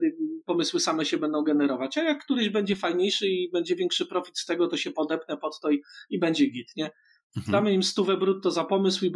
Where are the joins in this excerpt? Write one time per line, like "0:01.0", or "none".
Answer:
none